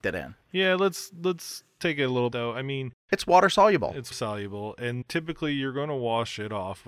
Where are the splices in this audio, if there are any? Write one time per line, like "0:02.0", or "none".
0:02.3
0:04.1
0:05.0